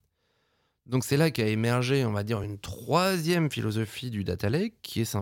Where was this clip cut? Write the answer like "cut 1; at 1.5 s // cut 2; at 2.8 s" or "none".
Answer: none